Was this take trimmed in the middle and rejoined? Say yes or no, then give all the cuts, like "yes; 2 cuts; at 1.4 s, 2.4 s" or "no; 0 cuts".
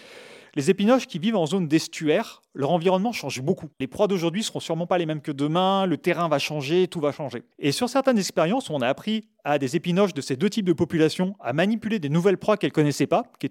yes; 2 cuts; at 3.7 s, 7.5 s